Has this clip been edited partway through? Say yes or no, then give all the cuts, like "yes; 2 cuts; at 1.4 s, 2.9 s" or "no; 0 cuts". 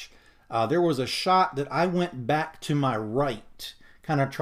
no; 0 cuts